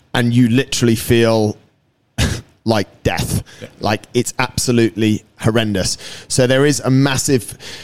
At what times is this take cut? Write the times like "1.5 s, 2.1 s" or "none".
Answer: none

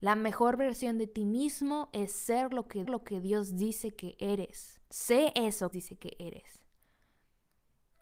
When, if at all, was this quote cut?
2.8 s, 4.9 s, 5.7 s

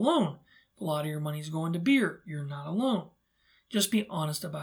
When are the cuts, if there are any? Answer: none

